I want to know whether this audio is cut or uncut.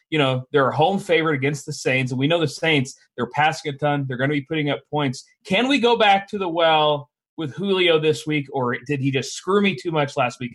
uncut